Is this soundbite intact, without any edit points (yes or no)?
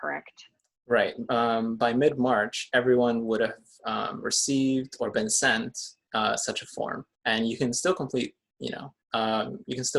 no